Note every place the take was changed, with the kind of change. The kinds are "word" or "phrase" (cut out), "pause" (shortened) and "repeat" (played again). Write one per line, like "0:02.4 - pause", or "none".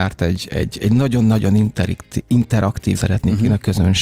0:02.9 - word